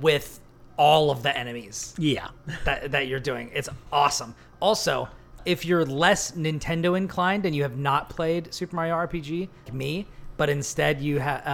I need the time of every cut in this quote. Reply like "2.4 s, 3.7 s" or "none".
5.4 s, 9.7 s